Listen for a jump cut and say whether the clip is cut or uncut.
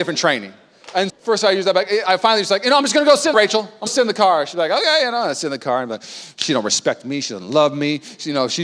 cut